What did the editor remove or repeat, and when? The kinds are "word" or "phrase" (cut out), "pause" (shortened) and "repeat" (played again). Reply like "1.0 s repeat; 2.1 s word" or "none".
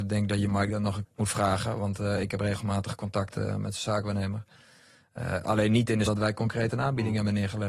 1.0 s word; 6.1 s phrase